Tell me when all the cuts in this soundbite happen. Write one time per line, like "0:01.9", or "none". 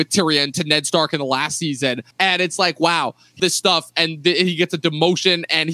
0:02.1
0:03.4